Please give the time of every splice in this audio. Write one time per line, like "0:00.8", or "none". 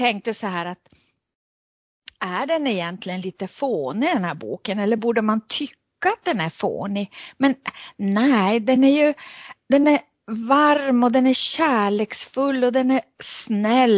none